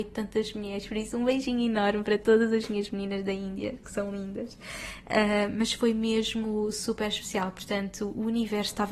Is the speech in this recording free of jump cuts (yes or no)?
yes